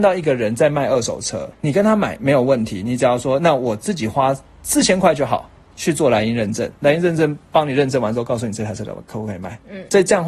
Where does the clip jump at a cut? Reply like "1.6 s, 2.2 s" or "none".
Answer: 1.5 s, 5.6 s